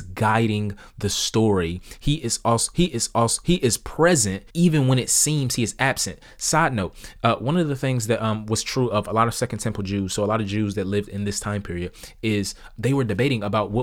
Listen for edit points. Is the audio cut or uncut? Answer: cut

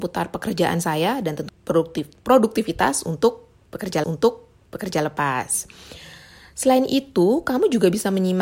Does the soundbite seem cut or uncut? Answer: cut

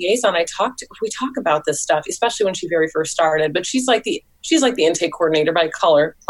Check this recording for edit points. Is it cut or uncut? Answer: uncut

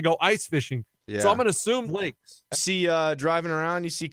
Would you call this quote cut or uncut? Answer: cut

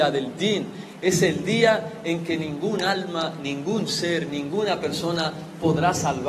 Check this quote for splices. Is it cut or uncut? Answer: uncut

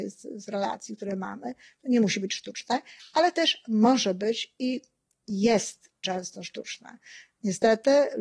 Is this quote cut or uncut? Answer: uncut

